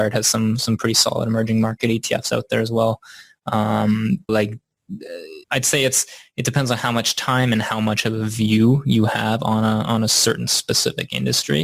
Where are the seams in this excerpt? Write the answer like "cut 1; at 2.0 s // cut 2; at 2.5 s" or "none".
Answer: cut 1; at 4.3 s // cut 2; at 5.4 s